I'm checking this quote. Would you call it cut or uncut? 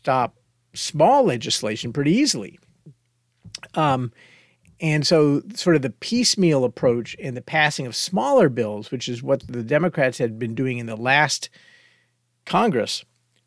uncut